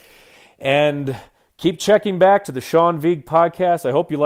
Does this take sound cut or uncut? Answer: uncut